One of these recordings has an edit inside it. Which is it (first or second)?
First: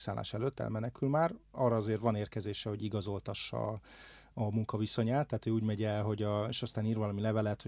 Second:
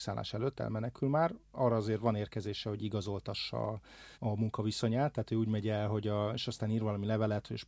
second